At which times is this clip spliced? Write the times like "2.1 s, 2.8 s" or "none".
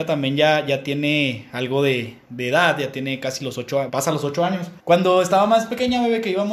3.9 s, 4.8 s